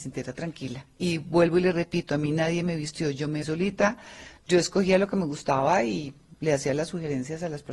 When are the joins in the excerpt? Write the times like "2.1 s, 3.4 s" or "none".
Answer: 3.4 s